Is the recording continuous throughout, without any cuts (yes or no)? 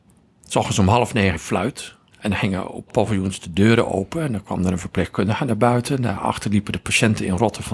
no